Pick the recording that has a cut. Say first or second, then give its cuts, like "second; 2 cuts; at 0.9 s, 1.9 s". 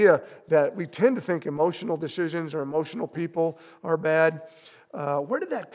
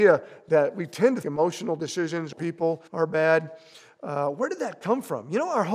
second; 3 cuts; at 1.2 s, 2.3 s, 2.9 s